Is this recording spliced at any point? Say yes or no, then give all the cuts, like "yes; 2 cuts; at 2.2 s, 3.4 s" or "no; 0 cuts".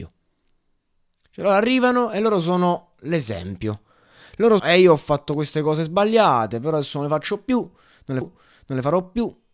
yes; 2 cuts; at 4.6 s, 8.2 s